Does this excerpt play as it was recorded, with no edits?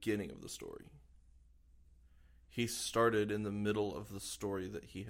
yes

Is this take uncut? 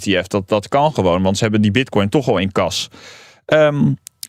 yes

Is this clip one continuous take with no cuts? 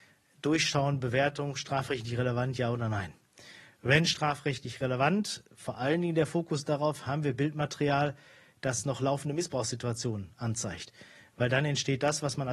yes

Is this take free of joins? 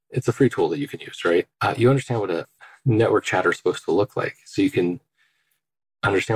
no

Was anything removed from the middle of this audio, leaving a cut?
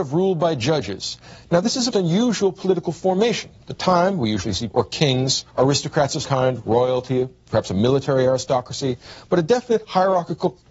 yes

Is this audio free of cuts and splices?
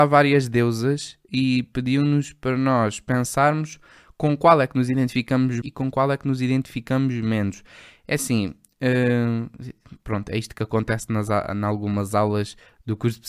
no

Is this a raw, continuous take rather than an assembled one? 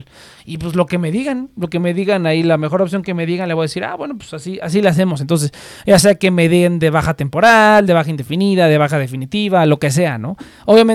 yes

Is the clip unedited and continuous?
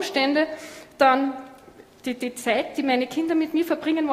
yes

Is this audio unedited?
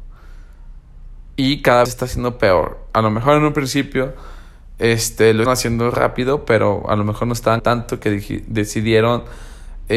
no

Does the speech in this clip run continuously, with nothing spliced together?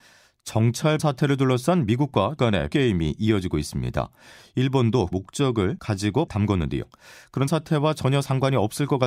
no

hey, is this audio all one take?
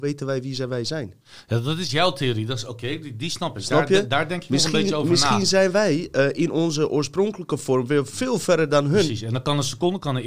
yes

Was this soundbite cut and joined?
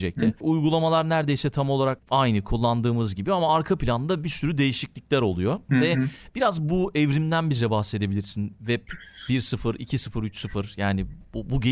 no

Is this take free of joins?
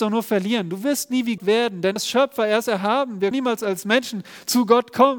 no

